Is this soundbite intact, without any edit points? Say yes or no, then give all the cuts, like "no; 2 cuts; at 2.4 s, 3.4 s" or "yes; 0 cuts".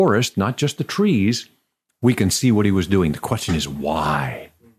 yes; 0 cuts